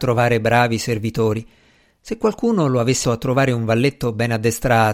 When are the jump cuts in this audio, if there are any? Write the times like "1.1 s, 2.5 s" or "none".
3.0 s